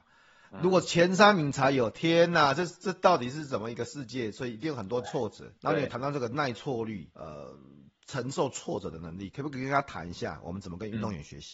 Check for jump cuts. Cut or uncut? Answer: cut